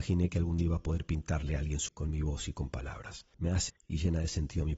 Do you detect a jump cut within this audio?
yes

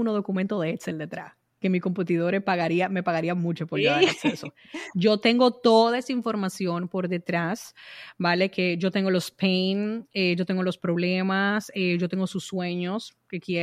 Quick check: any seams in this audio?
no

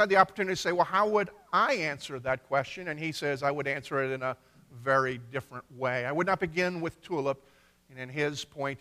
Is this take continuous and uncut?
yes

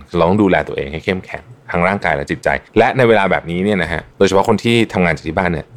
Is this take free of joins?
no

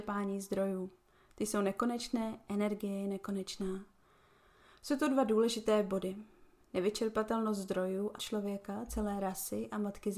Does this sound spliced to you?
yes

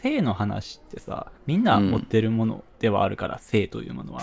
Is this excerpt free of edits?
no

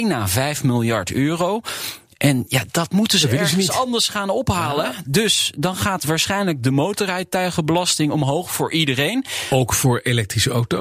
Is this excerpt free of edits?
yes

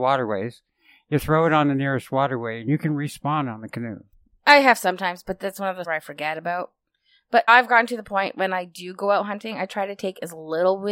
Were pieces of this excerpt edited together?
yes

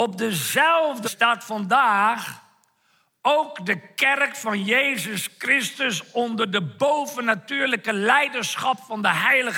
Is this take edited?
yes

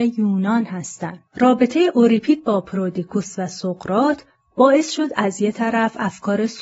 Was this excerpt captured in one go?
no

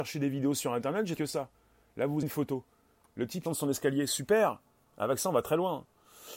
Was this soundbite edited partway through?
yes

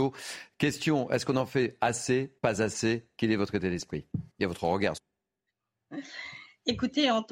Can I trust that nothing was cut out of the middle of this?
no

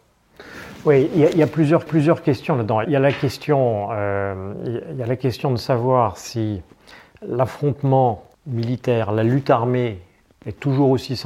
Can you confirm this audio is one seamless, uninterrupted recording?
no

